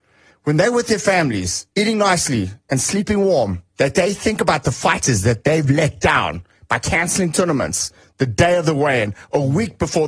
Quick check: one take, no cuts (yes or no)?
no